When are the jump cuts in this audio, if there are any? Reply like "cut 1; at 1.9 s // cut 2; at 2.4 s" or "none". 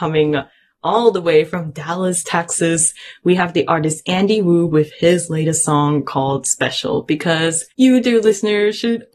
cut 1; at 7.7 s